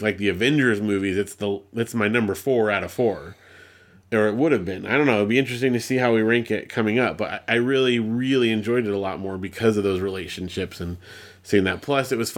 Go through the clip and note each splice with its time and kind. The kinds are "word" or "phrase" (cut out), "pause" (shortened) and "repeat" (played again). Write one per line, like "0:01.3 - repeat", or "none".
none